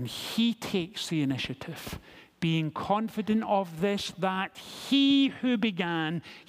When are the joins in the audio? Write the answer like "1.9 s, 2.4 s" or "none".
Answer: none